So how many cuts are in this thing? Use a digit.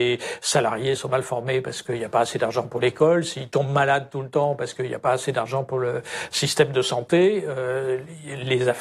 0